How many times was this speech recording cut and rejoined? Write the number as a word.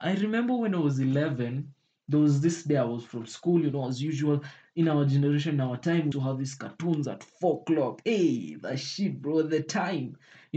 one